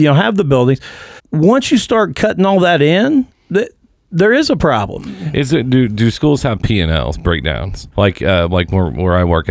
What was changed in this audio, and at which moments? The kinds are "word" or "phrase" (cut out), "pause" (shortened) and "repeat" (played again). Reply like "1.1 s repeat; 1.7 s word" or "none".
1.2 s pause; 3.3 s pause; 7.9 s pause